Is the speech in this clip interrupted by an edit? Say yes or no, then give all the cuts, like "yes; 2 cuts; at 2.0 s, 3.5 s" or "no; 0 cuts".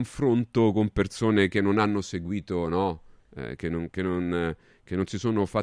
no; 0 cuts